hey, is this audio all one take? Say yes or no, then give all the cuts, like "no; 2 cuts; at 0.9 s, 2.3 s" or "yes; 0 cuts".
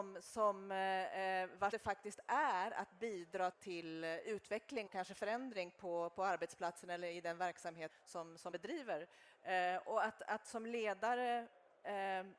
no; 5 cuts; at 1.7 s, 3.5 s, 4.9 s, 7.9 s, 8.5 s